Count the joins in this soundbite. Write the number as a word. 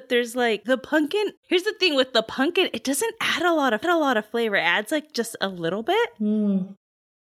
two